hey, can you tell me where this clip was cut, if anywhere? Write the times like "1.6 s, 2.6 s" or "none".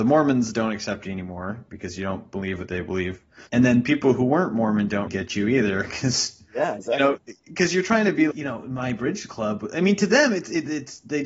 3.5 s, 5.1 s, 6.8 s, 8.3 s